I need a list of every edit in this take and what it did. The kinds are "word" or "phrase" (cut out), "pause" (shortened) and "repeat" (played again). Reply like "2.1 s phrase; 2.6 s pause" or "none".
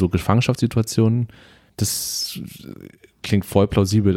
3.2 s word